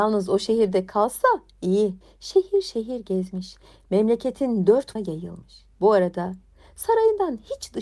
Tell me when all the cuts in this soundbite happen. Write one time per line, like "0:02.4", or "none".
0:02.0
0:05.0
0:05.7